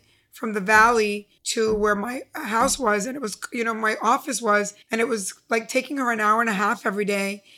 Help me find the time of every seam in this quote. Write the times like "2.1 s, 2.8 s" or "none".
1.4 s, 4.8 s

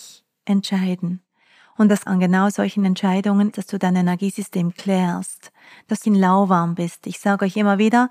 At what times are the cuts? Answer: 2.1 s, 3.5 s, 6.0 s

